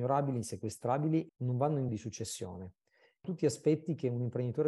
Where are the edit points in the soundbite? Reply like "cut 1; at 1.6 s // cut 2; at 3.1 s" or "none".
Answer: cut 1; at 1.3 s // cut 2; at 1.9 s // cut 3; at 3.2 s